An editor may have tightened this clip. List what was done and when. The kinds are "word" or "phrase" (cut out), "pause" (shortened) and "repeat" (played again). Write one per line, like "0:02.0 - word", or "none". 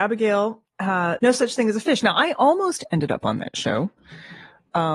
0:01.2 - word